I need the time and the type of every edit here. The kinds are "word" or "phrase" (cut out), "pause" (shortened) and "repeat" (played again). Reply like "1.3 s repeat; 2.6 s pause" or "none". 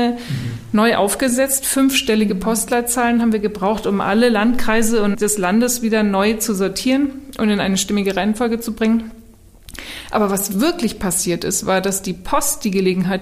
5.1 s word